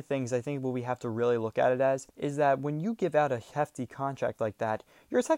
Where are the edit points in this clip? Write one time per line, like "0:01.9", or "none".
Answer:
0:02.1